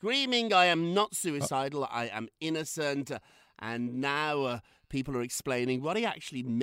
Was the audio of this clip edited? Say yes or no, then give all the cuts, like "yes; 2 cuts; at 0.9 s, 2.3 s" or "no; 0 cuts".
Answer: no; 0 cuts